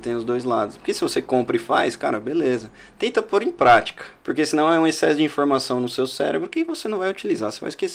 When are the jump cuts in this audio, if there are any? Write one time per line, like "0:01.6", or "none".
0:04.2